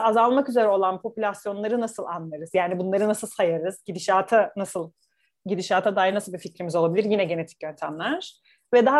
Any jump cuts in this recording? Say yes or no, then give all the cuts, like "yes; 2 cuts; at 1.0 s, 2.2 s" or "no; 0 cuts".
no; 0 cuts